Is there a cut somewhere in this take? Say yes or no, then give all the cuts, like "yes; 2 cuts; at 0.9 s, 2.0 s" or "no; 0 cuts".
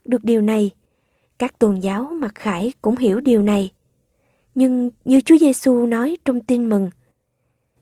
no; 0 cuts